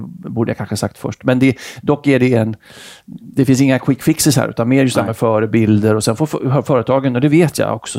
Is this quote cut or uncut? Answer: uncut